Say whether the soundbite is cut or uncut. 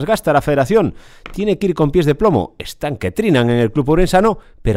uncut